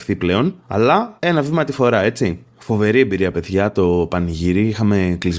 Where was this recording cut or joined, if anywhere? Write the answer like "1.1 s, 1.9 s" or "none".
none